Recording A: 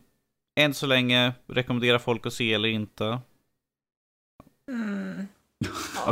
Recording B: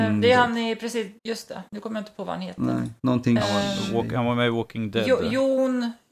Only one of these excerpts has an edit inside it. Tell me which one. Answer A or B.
B